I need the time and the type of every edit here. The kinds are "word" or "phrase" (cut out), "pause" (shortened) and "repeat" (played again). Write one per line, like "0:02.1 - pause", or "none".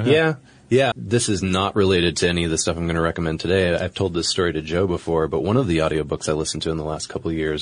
0:00.9 - word